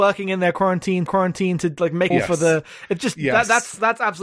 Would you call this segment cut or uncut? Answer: cut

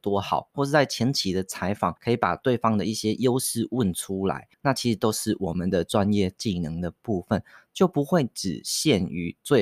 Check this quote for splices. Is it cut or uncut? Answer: cut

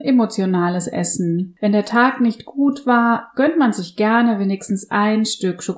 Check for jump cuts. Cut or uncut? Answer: uncut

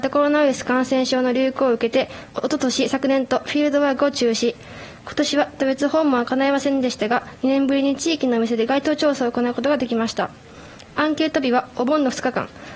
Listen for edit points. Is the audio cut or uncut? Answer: cut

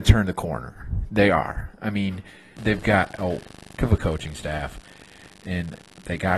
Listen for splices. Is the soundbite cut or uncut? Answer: cut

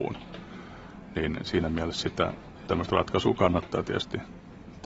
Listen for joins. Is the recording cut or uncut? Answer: cut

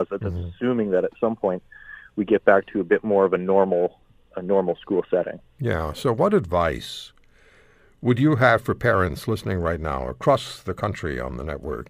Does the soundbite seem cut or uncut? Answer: uncut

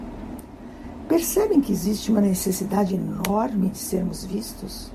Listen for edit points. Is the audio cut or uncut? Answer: uncut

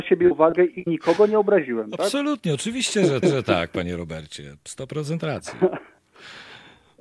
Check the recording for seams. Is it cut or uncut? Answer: cut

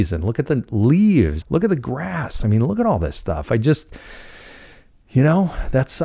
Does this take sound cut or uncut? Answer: cut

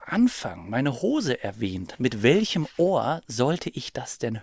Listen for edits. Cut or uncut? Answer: cut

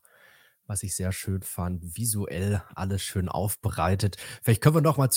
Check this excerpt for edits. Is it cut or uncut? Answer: uncut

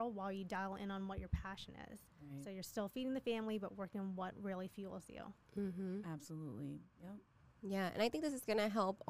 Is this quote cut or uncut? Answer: uncut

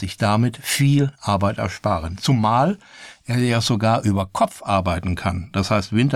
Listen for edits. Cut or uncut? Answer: uncut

